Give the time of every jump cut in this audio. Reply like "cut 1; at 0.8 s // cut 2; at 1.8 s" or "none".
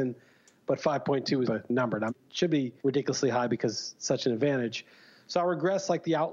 cut 1; at 1.4 s // cut 2; at 2.1 s // cut 3; at 2.8 s